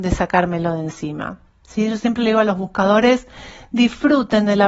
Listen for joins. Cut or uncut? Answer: uncut